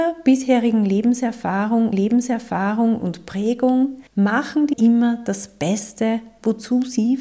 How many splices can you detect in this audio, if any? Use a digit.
3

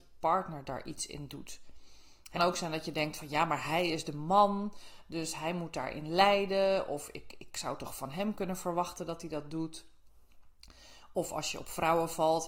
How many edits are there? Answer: 1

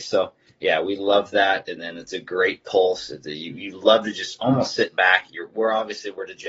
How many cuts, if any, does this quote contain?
0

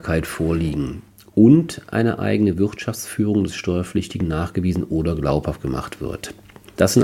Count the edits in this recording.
0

